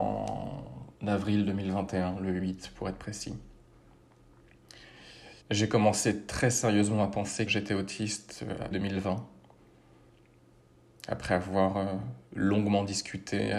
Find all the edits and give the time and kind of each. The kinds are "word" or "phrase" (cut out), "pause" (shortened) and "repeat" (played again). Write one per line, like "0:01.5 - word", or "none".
0:05.4 - pause
0:07.5 - word
0:08.7 - phrase

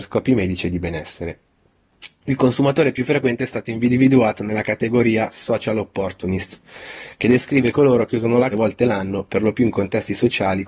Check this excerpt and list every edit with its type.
0:08.5 - phrase

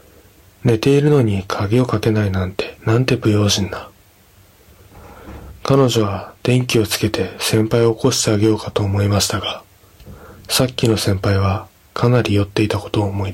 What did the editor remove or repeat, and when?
0:02.8 - pause

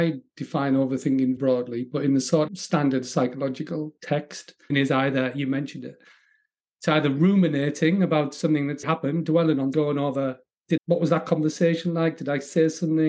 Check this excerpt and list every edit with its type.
0:01.4 - word
0:02.5 - word
0:04.7 - word
0:08.8 - word
0:09.7 - word
0:10.8 - word

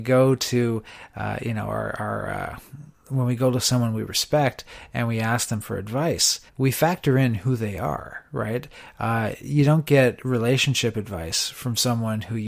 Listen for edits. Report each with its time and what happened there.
0:06.5 - pause

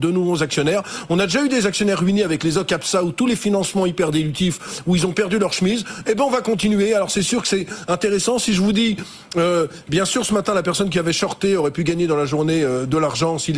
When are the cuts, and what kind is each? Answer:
none

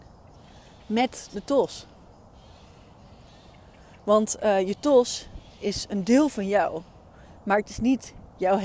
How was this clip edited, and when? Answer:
none

